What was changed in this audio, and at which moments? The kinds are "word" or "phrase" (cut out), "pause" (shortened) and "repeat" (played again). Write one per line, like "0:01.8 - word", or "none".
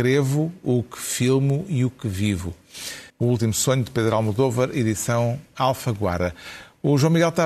0:03.1 - pause